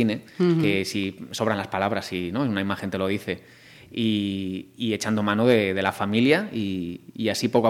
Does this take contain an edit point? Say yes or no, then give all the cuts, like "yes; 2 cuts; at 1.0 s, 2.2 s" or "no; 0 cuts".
no; 0 cuts